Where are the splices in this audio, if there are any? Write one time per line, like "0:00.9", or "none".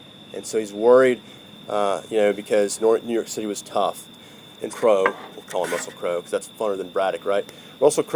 0:02.8
0:04.7